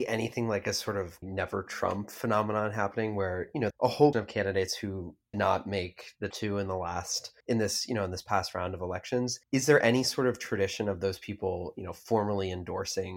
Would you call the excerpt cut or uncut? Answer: cut